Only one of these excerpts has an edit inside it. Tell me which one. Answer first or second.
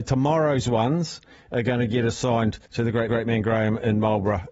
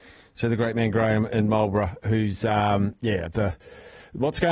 first